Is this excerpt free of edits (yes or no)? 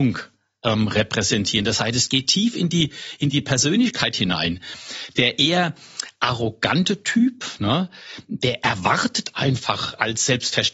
yes